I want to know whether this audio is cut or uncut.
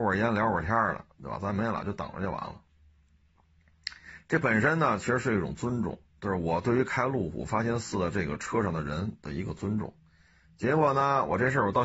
cut